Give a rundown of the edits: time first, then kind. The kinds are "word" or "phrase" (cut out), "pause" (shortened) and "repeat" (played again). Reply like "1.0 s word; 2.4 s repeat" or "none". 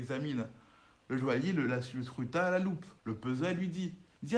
3.0 s pause